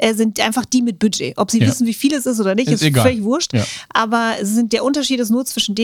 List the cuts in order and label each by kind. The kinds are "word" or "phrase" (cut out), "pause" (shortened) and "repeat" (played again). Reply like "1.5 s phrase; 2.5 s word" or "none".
4.7 s word